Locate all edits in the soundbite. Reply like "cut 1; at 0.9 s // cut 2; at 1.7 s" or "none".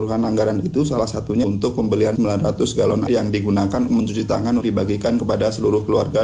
cut 1; at 1.4 s // cut 2; at 2.2 s // cut 3; at 3.1 s // cut 4; at 3.9 s // cut 5; at 4.6 s